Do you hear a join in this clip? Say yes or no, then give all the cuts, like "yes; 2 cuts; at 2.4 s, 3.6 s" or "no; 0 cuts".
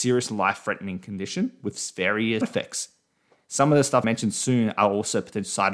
yes; 2 cuts; at 2.4 s, 4.0 s